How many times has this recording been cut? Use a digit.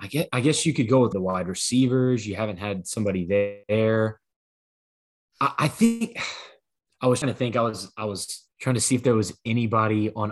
4